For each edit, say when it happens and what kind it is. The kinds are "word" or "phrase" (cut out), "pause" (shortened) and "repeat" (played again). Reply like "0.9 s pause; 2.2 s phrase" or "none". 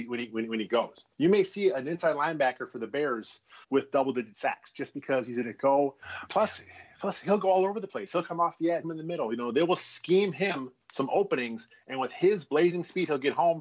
1.1 s pause; 3.6 s pause; 8.8 s phrase; 10.8 s pause

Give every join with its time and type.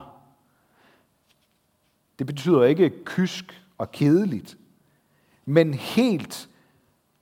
none

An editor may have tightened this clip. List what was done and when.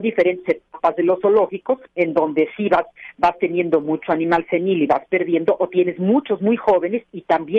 1.9 s pause

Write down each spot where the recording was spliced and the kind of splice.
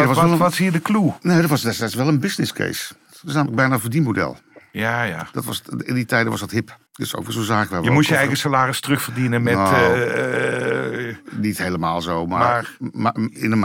6.9 s pause

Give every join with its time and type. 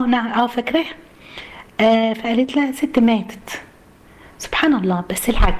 none

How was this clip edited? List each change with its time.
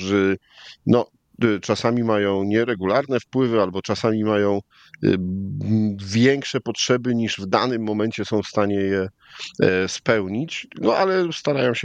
none

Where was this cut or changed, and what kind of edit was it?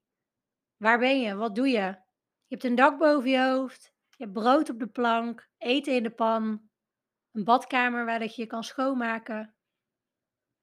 2.3 s pause; 5.5 s pause; 6.8 s pause

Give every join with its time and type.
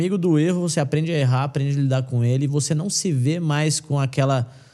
none

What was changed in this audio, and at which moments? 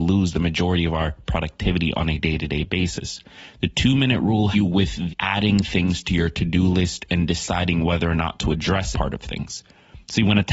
4.5 s word; 5.1 s word; 8.9 s word

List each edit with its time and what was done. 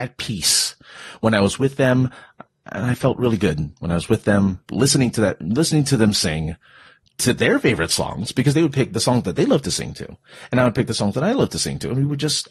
none

